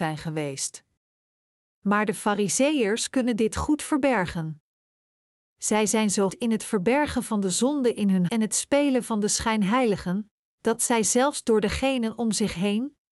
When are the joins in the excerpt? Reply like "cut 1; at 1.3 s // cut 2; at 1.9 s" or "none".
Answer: cut 1; at 6.3 s // cut 2; at 8.3 s